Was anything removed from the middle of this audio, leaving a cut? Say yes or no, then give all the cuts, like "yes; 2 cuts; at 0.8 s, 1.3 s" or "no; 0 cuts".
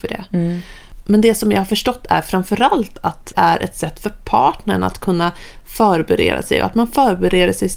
yes; 1 cut; at 3.3 s